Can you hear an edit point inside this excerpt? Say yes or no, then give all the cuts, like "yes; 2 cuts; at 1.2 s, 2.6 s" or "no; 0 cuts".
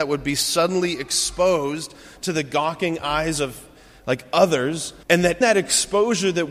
yes; 2 cuts; at 5.0 s, 5.4 s